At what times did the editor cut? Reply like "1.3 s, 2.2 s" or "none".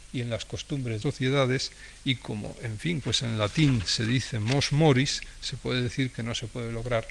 1.0 s, 3.0 s